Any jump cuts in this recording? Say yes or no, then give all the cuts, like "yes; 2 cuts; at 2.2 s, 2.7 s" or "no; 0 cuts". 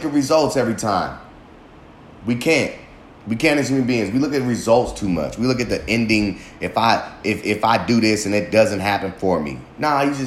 no; 0 cuts